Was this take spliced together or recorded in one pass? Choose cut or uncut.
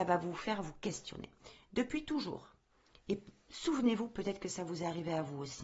uncut